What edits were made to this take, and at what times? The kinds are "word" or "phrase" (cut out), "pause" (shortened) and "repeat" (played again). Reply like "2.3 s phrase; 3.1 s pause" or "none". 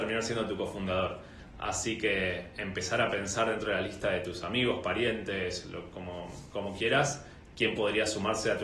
none